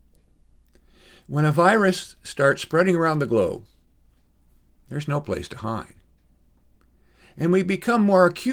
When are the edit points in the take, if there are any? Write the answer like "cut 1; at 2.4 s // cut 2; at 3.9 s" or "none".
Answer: none